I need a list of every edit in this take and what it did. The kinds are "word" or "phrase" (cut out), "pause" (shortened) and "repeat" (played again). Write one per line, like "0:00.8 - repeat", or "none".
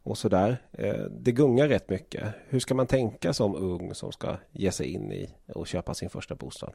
none